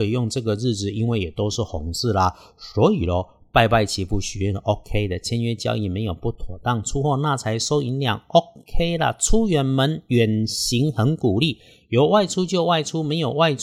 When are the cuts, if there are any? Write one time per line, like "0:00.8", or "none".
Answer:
none